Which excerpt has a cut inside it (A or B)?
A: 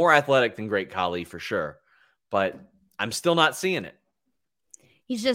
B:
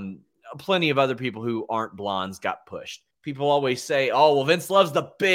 B